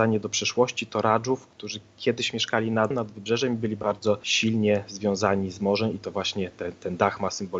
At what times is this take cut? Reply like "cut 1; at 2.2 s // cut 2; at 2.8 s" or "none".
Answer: none